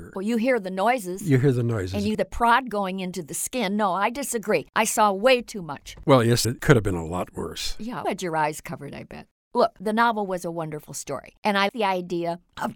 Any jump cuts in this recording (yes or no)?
yes